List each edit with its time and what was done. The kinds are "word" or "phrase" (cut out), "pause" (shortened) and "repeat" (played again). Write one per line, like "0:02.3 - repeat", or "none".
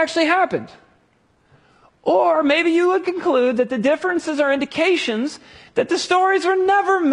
none